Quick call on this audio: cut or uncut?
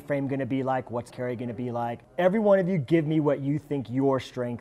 cut